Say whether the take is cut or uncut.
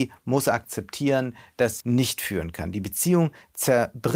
cut